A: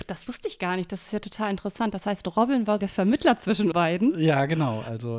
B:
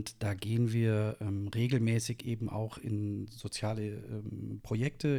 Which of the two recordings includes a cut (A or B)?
A